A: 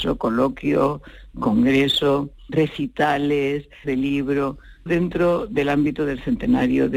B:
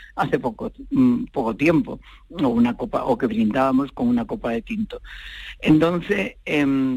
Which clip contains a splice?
A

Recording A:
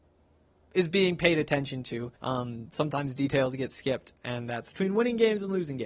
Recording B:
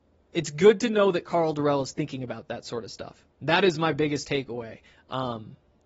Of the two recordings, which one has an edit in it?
A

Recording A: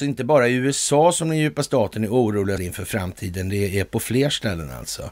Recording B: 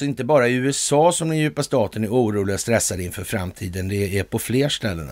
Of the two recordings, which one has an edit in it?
A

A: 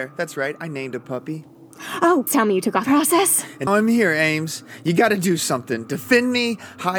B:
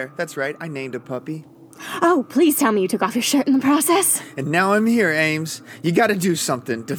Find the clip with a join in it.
A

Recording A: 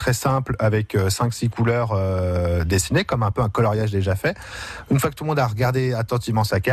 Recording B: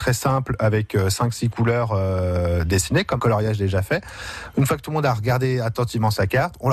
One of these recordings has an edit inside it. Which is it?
B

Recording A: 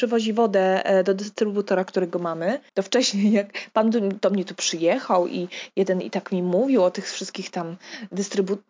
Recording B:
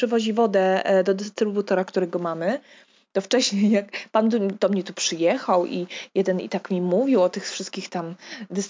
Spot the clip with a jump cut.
A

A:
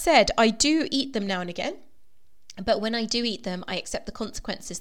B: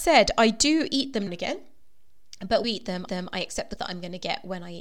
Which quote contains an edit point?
B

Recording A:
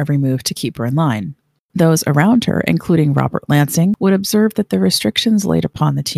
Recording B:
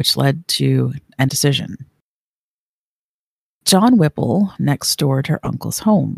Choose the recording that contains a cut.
B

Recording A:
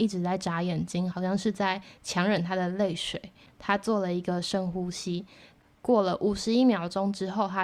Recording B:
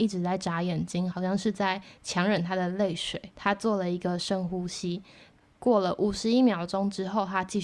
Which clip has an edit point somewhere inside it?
B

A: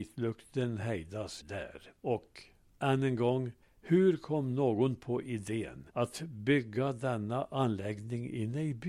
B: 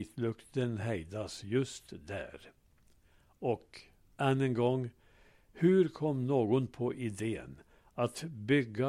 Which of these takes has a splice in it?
A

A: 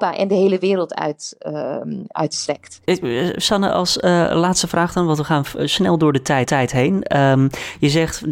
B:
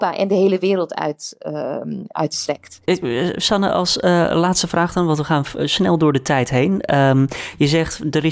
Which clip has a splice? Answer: A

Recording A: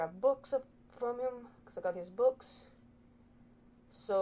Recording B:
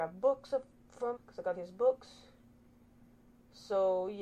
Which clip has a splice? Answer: B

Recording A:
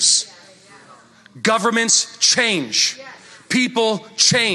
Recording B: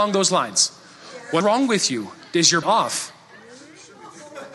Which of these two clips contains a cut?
B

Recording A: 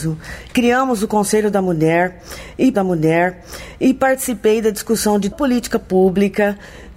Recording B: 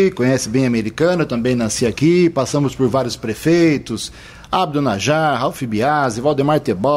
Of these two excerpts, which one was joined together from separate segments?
A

